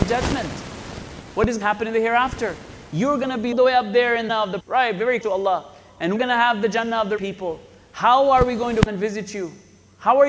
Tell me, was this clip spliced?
yes; 8 cuts; at 1.6 s, 3.5 s, 4.3 s, 4.6 s, 5.2 s, 6.2 s, 7.2 s, 8.9 s

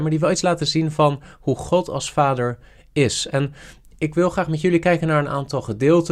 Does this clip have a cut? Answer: no; 0 cuts

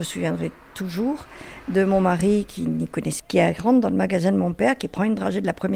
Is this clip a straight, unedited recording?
no; 1 cut; at 3.2 s

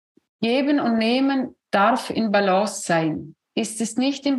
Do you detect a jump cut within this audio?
no; 0 cuts

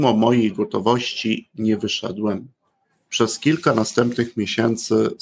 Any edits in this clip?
no; 0 cuts

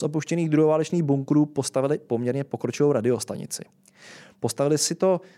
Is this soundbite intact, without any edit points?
yes; 0 cuts

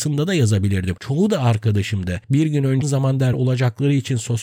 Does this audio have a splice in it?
yes; 2 cuts; at 2.8 s, 3.3 s

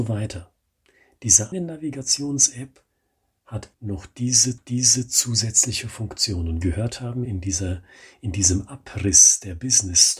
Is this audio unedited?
no; 5 cuts; at 1.5 s, 3.7 s, 4.6 s, 6.6 s, 7.3 s

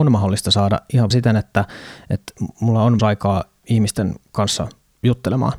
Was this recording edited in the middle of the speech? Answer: yes; 3 cuts; at 1.1 s, 3.0 s, 3.6 s

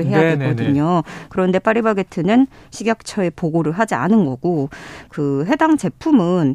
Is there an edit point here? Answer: no; 0 cuts

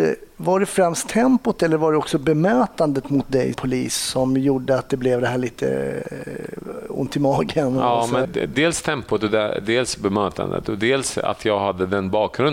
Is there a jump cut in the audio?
yes; 2 cuts; at 3.5 s, 8.2 s

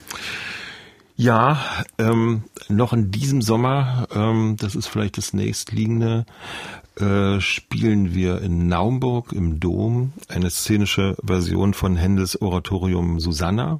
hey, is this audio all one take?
yes; 0 cuts

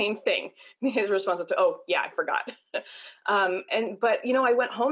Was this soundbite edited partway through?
no; 0 cuts

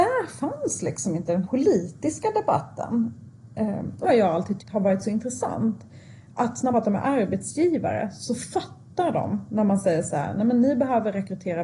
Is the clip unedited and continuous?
no; 4 cuts; at 1.4 s, 4.0 s, 4.6 s, 6.7 s

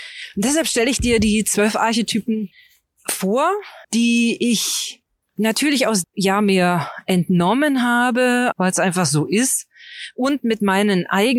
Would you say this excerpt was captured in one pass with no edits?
no; 4 cuts; at 3.8 s, 5.2 s, 6.0 s, 8.5 s

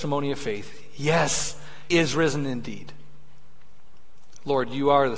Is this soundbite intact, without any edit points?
no; 1 cut; at 1.9 s

